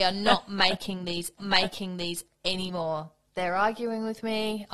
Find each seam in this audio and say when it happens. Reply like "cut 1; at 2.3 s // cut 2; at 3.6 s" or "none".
cut 1; at 1.4 s

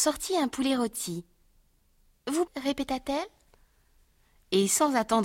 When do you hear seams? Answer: cut 1; at 2.5 s

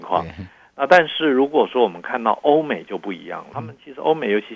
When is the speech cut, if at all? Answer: cut 1; at 3.5 s

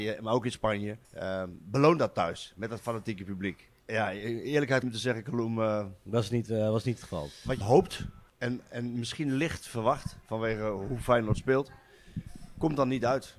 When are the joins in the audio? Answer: cut 1; at 1.0 s // cut 2; at 3.8 s // cut 3; at 4.8 s // cut 4; at 7.6 s // cut 5; at 8.3 s // cut 6; at 10.2 s

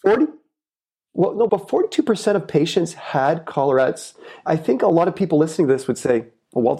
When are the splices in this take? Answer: cut 1; at 1.5 s // cut 2; at 4.5 s

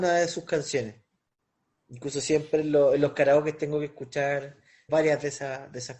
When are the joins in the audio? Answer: cut 1; at 4.9 s

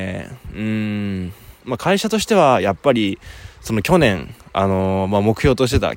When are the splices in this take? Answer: cut 1; at 1.5 s

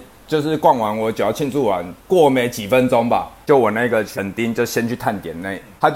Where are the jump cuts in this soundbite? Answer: cut 1; at 2.0 s

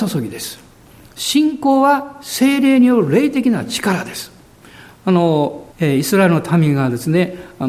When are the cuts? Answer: cut 1; at 4.6 s // cut 2; at 5.7 s

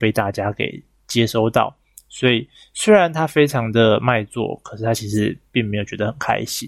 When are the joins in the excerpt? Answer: none

